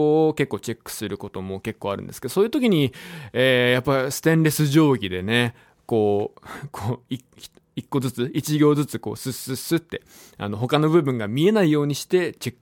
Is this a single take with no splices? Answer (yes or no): yes